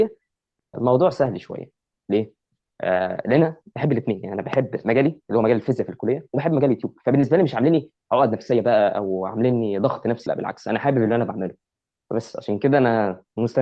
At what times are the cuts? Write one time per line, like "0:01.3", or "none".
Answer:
0:10.3